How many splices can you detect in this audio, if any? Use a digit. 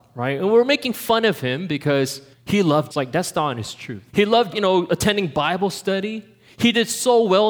4